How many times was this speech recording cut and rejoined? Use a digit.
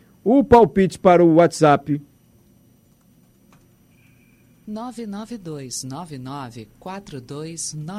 0